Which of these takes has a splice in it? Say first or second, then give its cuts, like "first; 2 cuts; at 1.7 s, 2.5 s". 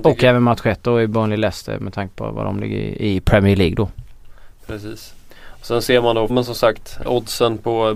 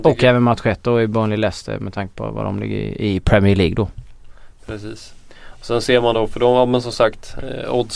first; 2 cuts; at 6.3 s, 7.1 s